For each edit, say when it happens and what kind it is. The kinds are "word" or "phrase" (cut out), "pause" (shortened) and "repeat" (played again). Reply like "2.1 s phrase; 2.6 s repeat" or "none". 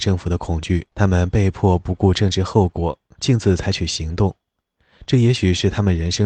0.9 s pause